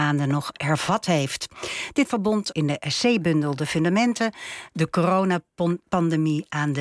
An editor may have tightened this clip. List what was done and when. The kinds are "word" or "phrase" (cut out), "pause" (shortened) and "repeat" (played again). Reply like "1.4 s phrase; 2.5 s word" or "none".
2.0 s word; 2.5 s word